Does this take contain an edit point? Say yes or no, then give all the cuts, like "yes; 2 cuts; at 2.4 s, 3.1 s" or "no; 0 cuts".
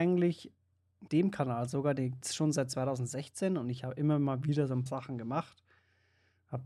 yes; 3 cuts; at 1.1 s, 2.2 s, 4.9 s